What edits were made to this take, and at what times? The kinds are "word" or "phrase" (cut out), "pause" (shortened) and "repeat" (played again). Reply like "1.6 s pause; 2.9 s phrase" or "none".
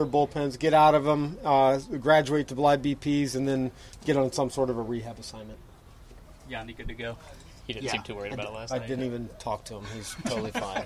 none